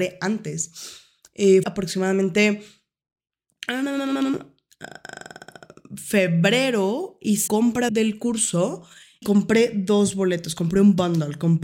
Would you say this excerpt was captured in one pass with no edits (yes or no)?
no